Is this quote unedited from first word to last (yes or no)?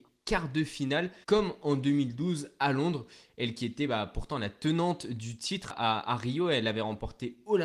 no